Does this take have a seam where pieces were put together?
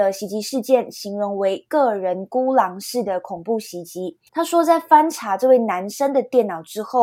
yes; 1 cut; at 4.3 s

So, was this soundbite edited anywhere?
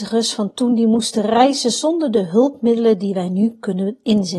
no; 0 cuts

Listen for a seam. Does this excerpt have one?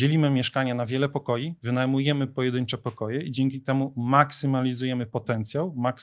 no; 0 cuts

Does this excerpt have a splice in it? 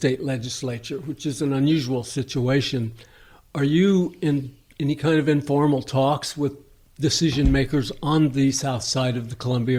no; 0 cuts

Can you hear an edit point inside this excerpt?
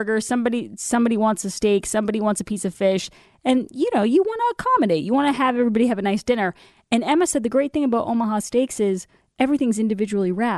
no; 0 cuts

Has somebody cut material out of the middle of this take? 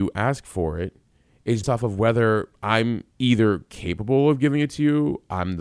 yes; 2 cuts; at 1.6 s, 3.1 s

